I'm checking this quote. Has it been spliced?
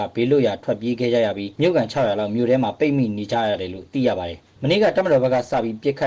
no; 0 cuts

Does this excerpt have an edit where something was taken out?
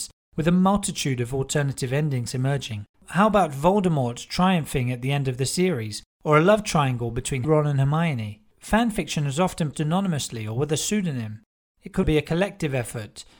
yes; 4 cuts; at 2.9 s, 7.4 s, 9.7 s, 12.0 s

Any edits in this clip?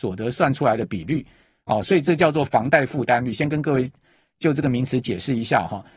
no; 0 cuts

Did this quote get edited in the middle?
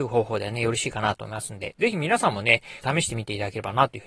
yes; 1 cut; at 2.8 s

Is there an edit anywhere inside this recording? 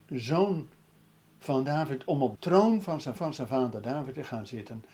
yes; 2 cuts; at 2.4 s, 3.2 s

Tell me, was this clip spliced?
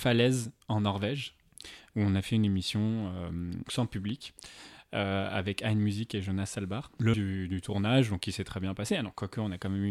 yes; 2 cuts; at 3.7 s, 7.1 s

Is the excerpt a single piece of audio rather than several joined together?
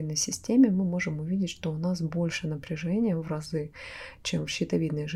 yes; 0 cuts

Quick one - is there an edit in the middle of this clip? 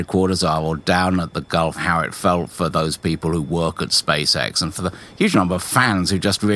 no; 0 cuts

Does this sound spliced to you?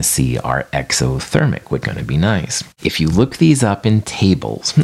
yes; 2 cuts; at 1.8 s, 2.7 s

